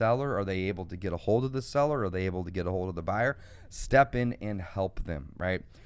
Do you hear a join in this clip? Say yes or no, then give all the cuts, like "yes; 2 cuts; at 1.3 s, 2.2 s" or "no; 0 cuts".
no; 0 cuts